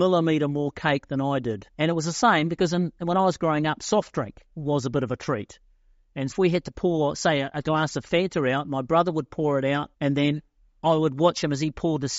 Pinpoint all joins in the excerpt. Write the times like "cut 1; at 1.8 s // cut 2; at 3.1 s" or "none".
cut 1; at 1.7 s // cut 2; at 4.5 s // cut 3; at 6.3 s // cut 4; at 9.9 s